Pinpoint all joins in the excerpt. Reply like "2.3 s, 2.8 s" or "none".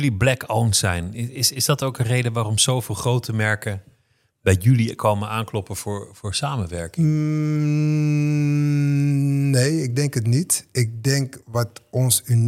none